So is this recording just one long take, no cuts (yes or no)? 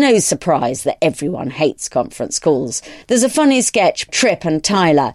no